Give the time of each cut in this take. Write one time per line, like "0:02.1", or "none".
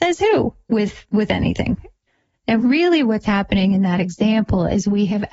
none